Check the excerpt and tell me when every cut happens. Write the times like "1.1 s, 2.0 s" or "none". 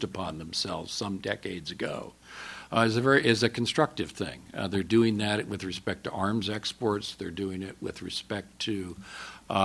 none